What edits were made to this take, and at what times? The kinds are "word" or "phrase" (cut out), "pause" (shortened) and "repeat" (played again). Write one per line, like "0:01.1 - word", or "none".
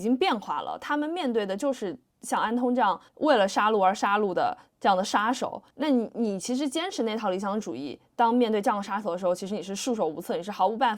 0:03.1 - pause
0:05.7 - pause